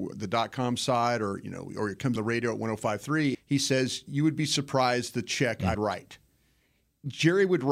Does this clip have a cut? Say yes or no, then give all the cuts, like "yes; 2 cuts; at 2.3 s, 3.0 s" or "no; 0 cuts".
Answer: yes; 3 cuts; at 2.2 s, 3.3 s, 5.7 s